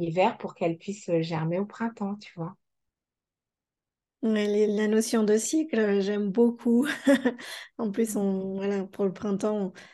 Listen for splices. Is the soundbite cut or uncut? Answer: uncut